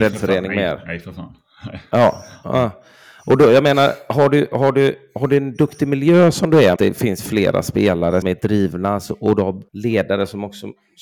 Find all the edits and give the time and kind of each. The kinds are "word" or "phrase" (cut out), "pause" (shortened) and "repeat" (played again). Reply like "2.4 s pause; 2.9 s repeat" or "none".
6.8 s phrase; 8.2 s word; 9.7 s pause